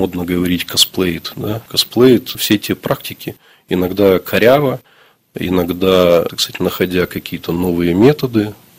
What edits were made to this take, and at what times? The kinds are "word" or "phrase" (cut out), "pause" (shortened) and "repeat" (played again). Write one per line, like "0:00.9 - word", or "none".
none